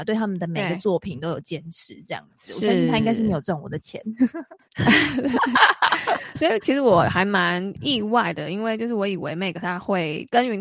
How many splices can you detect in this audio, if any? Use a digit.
1